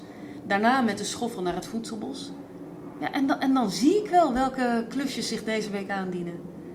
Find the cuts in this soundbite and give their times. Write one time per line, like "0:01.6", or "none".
none